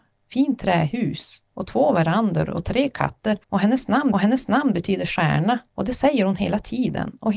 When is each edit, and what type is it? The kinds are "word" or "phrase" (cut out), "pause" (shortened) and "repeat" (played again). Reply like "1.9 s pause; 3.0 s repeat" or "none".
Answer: 3.4 s pause; 4.1 s repeat; 5.7 s pause